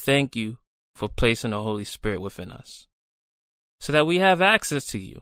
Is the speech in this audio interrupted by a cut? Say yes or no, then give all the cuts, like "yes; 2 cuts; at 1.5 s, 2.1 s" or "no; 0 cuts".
no; 0 cuts